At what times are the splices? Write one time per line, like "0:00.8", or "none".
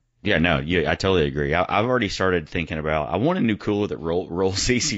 none